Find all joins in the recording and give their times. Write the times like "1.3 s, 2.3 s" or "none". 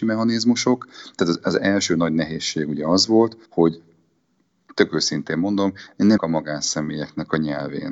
3.5 s, 6.2 s